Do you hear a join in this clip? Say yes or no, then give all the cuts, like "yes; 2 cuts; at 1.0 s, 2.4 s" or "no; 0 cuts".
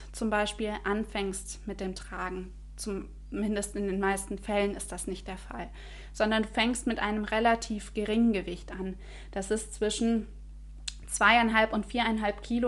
no; 0 cuts